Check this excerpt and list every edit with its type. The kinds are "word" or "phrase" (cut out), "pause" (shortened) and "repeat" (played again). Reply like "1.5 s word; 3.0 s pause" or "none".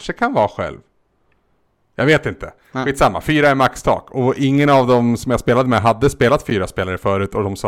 none